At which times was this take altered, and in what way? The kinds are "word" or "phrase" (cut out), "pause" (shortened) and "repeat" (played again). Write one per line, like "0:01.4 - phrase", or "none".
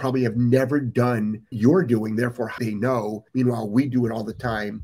0:01.5 - word
0:02.6 - word
0:03.3 - pause

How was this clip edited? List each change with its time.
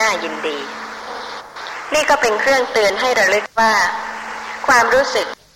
0:03.5 - pause

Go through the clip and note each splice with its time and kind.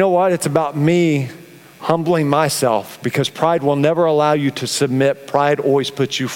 none

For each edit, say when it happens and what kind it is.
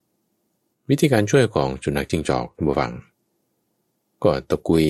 none

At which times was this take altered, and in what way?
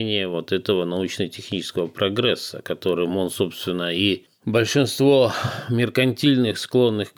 none

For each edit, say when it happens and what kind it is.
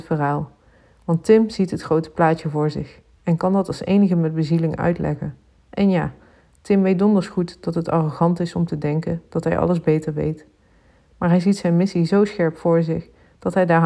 none

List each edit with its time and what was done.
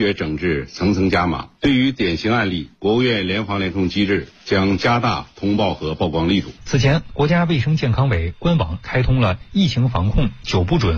0:01.6 - pause
0:02.7 - pause
0:06.6 - pause

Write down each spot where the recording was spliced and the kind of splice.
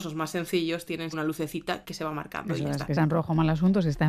0:01.1 - word
0:01.8 - word
0:03.0 - word

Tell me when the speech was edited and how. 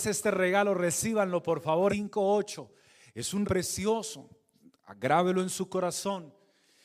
0:01.9 - word
0:03.4 - word

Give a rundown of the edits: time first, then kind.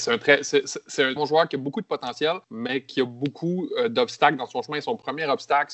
0:01.2 - word
0:02.4 - pause

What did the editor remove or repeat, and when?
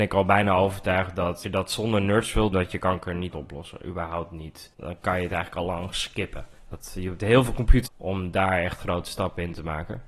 0:01.4 - word
0:02.5 - word
0:03.3 - word
0:04.7 - pause
0:06.6 - pause
0:07.9 - phrase

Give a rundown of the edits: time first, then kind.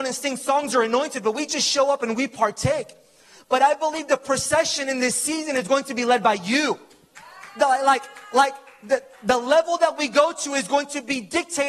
none

